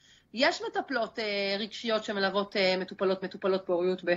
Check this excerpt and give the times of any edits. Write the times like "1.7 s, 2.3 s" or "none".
3.2 s